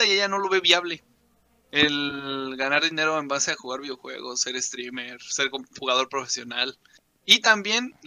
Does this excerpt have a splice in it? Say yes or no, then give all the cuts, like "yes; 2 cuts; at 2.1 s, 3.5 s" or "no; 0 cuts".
no; 0 cuts